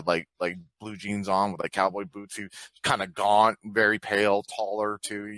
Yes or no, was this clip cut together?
no